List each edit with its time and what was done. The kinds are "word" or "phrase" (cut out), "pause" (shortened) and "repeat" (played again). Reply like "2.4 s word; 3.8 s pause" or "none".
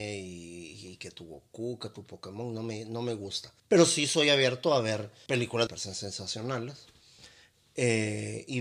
3.6 s pause; 5.3 s word; 5.7 s phrase